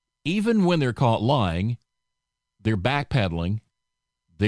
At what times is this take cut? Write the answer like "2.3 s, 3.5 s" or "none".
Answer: none